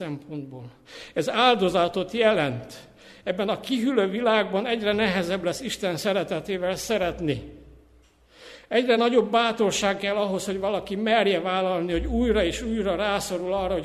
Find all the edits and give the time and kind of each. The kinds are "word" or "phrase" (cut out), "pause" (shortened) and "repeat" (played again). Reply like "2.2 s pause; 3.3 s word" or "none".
none

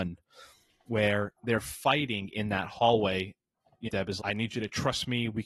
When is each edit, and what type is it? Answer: 3.9 s word; 4.2 s word

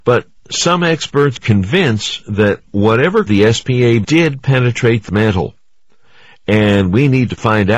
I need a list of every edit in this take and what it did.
1.4 s word; 3.3 s word; 4.0 s word; 5.1 s word

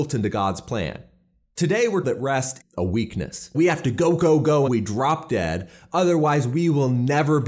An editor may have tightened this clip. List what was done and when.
2.0 s word; 2.6 s word; 3.5 s word; 4.7 s word

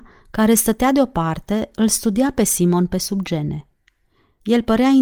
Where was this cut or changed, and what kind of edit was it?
none

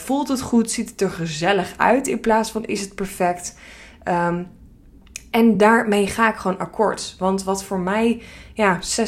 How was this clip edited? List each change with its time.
none

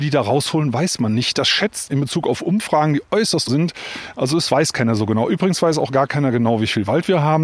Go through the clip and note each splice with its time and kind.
1.9 s word; 3.5 s word

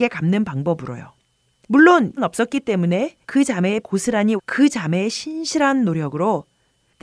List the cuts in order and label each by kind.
2.2 s word; 3.2 s pause; 3.8 s word; 4.4 s phrase

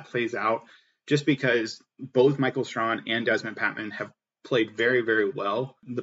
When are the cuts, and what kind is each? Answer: none

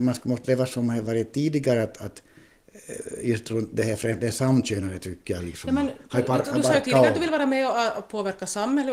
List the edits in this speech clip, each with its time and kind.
none

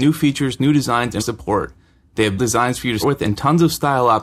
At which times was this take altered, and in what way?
1.2 s word; 2.4 s word; 3.0 s word

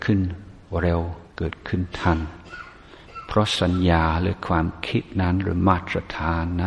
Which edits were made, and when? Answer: 1.3 s pause

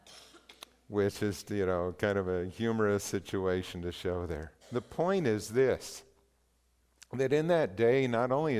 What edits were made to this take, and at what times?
1.4 s word; 4.6 s pause

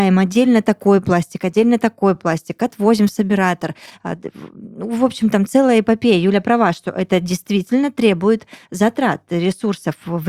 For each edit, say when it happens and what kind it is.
none

